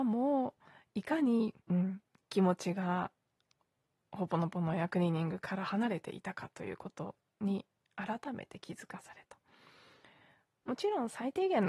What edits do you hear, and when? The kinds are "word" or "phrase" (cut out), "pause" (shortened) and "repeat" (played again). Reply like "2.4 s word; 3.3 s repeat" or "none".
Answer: 1.6 s pause